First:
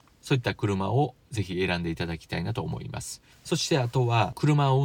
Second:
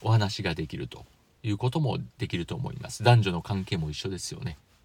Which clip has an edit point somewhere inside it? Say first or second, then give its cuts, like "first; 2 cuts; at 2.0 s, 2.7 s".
first; 1 cut; at 3.3 s